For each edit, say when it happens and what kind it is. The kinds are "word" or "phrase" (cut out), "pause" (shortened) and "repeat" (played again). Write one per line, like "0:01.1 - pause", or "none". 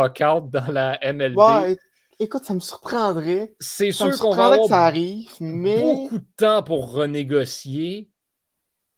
none